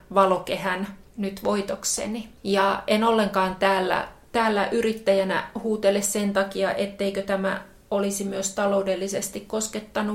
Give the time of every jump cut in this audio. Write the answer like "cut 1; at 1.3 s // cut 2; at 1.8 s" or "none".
cut 1; at 1.1 s // cut 2; at 2.4 s

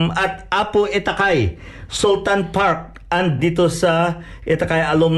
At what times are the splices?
cut 1; at 3.4 s

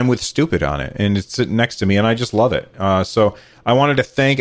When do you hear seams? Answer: none

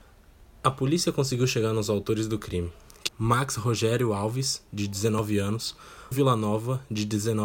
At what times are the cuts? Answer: cut 1; at 3.1 s // cut 2; at 6.1 s

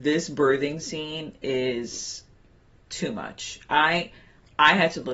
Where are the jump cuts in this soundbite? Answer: none

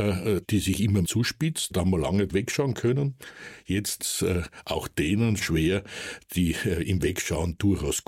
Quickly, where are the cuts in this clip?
cut 1; at 1.0 s // cut 2; at 1.7 s // cut 3; at 2.3 s // cut 4; at 4.0 s // cut 5; at 5.4 s

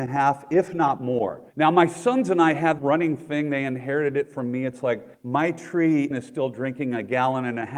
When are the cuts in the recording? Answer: cut 1; at 1.5 s // cut 2; at 2.8 s // cut 3; at 5.1 s // cut 4; at 6.1 s

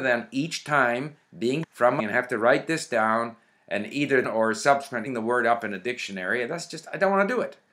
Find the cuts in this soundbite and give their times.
cut 1; at 1.6 s // cut 2; at 2.0 s // cut 3; at 4.2 s // cut 4; at 5.1 s

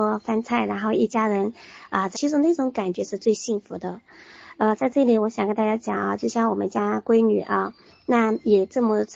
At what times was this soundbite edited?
cut 1; at 2.1 s // cut 2; at 7.9 s

